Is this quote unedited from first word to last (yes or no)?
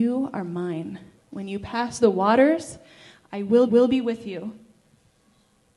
no